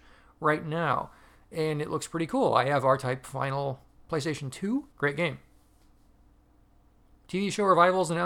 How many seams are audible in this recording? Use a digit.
2